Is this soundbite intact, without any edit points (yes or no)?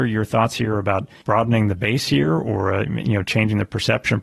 yes